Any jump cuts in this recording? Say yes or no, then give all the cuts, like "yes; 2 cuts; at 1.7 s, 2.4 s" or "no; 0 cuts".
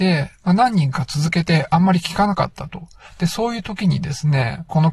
no; 0 cuts